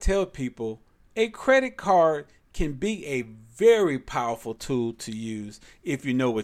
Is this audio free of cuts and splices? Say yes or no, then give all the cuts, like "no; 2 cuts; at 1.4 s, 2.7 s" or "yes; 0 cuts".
yes; 0 cuts